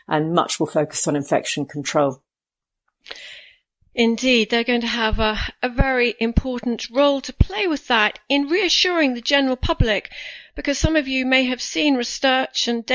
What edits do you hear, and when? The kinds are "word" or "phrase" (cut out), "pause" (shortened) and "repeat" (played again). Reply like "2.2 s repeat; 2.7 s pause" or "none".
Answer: none